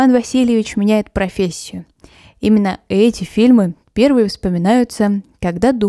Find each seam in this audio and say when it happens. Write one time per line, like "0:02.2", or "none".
none